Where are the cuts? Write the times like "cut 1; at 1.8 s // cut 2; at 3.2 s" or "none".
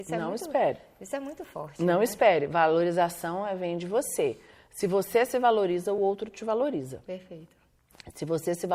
none